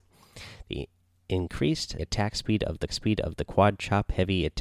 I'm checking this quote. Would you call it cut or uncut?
cut